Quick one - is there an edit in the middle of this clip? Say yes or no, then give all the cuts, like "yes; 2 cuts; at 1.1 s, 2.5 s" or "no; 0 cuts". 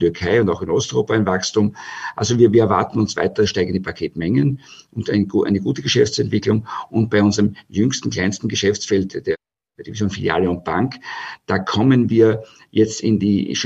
no; 0 cuts